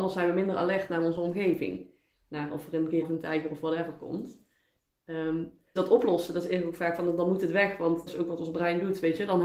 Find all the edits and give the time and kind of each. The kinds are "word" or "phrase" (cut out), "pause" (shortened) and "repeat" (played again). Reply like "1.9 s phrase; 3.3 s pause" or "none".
3.0 s word; 5.8 s word; 8.1 s word